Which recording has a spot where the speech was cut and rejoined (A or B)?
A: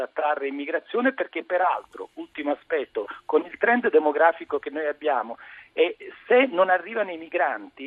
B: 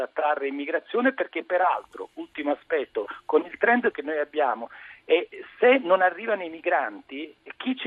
B